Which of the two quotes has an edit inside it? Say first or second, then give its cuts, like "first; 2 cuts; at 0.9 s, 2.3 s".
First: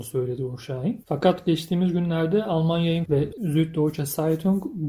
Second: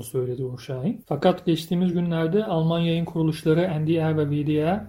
first; 1 cut; at 3.1 s